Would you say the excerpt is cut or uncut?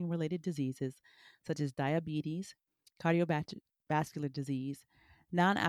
uncut